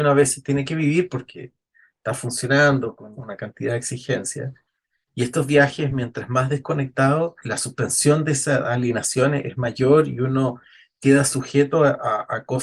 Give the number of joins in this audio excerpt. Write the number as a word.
one